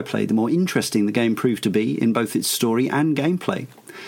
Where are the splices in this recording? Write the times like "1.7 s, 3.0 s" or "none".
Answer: none

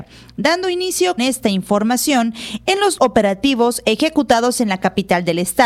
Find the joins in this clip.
1.2 s, 3.0 s

